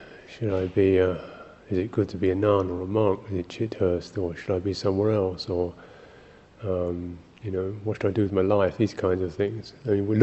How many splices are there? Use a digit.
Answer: 0